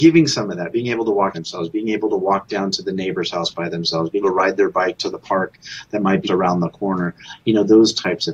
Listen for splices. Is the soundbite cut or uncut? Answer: cut